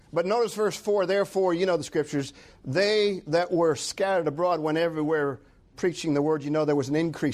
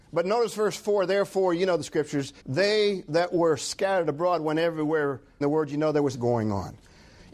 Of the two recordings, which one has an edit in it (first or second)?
second